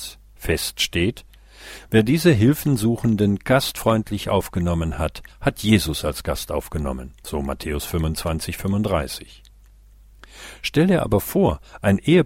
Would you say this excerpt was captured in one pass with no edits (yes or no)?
no